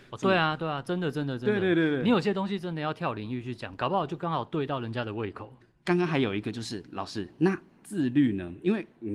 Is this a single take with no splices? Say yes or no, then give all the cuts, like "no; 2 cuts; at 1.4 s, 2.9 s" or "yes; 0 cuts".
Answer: yes; 0 cuts